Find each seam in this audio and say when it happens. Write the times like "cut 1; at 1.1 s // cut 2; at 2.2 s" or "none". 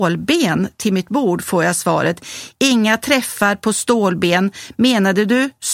none